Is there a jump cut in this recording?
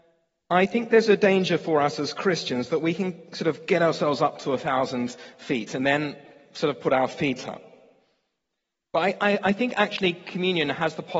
no; 0 cuts

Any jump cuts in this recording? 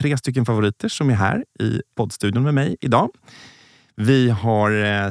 no; 0 cuts

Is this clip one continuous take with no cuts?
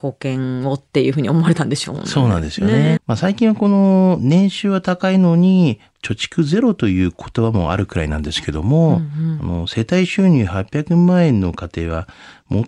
no; 1 cut; at 3.0 s

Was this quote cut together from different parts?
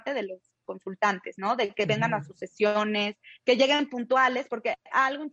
no; 0 cuts

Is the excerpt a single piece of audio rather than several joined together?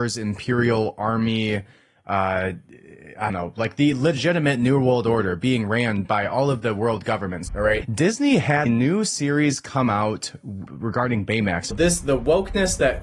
no; 4 cuts; at 3.3 s, 7.8 s, 8.7 s, 10.7 s

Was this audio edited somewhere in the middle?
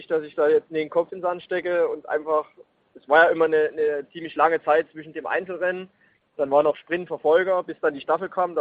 no; 0 cuts

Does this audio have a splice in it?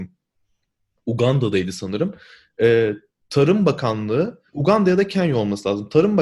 yes; 1 cut; at 4.5 s

